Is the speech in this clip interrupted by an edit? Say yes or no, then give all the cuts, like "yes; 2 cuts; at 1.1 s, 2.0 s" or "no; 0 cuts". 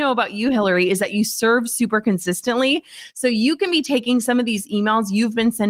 no; 0 cuts